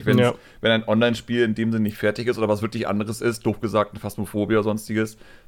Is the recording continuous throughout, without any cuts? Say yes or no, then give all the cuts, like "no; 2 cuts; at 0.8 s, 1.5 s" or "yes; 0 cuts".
yes; 0 cuts